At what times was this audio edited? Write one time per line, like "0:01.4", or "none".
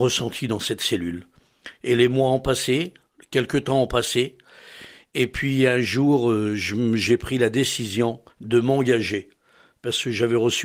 0:08.3